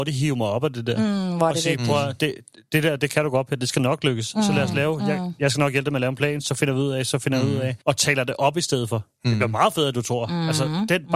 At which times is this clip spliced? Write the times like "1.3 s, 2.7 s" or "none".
7.8 s